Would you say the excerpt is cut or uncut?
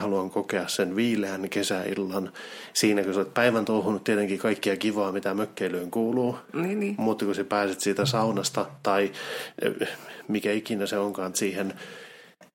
cut